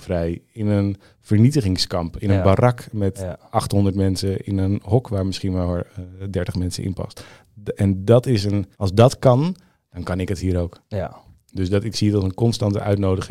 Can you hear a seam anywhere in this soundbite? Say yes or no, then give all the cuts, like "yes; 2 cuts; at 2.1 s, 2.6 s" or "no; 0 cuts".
yes; 1 cut; at 8.7 s